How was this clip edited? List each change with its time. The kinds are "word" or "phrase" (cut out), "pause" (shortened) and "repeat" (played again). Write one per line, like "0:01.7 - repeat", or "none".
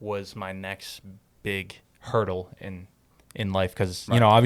0:01.8 - pause